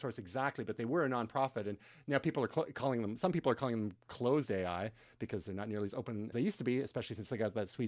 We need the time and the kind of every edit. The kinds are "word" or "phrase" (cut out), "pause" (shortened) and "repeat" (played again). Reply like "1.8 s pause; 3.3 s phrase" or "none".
6.3 s word